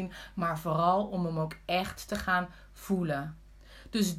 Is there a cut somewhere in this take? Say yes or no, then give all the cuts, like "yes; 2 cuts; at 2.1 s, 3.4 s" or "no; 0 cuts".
no; 0 cuts